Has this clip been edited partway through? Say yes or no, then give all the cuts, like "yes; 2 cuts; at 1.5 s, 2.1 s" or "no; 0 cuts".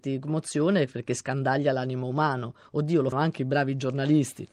yes; 1 cut; at 3.1 s